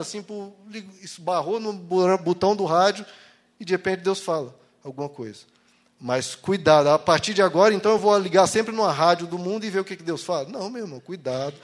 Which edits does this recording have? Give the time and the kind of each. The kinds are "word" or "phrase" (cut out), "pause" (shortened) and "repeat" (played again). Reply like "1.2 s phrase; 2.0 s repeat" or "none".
none